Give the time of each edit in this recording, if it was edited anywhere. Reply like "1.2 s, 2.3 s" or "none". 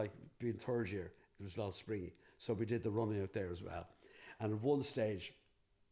none